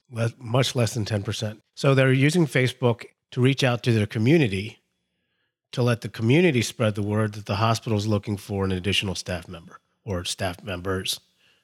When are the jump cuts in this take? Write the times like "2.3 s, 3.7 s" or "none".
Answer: 1.7 s